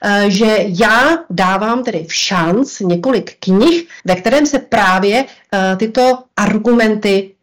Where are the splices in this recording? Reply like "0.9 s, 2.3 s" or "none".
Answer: 4.0 s